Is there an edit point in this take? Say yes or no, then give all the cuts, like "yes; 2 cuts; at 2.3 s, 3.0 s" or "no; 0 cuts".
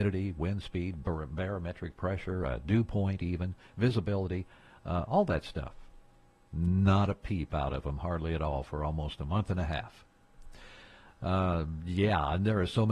no; 0 cuts